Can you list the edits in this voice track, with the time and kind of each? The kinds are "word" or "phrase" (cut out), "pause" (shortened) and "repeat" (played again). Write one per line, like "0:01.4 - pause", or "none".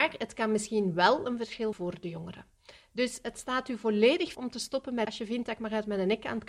0:01.7 - word
0:04.3 - word
0:05.0 - word